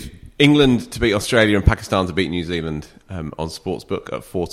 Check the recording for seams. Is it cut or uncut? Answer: uncut